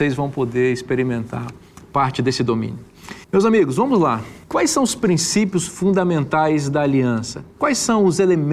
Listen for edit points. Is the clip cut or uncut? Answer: cut